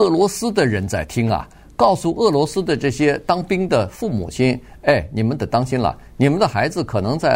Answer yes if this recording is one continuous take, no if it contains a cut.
yes